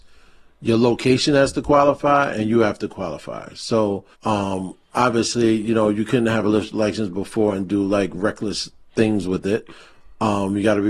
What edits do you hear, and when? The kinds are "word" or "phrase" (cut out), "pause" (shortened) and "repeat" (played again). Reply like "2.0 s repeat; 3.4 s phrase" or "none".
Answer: 4.1 s pause